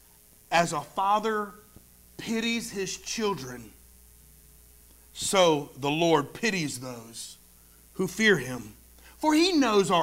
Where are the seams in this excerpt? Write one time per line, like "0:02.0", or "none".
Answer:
none